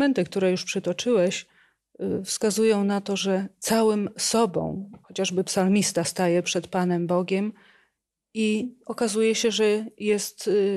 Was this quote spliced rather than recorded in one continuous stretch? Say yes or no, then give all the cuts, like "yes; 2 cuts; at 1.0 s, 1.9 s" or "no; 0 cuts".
yes; 1 cut; at 5.0 s